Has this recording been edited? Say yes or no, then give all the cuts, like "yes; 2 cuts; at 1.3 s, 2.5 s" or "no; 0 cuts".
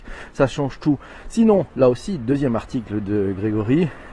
no; 0 cuts